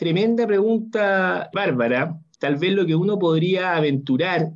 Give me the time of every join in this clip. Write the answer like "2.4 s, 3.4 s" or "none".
none